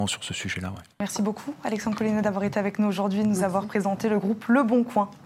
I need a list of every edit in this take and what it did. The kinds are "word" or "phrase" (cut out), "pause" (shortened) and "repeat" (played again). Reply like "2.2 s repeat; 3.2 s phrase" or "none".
0.9 s pause